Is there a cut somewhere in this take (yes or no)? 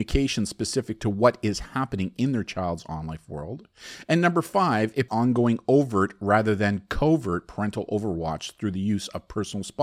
yes